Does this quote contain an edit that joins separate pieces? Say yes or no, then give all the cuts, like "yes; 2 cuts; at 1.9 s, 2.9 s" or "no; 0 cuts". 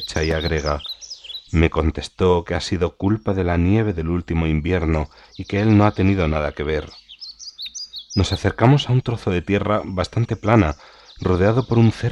no; 0 cuts